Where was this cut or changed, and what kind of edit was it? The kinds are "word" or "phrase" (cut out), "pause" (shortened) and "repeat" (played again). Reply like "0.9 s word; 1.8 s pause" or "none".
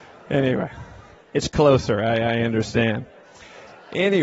1.1 s pause